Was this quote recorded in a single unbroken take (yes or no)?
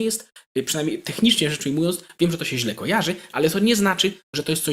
yes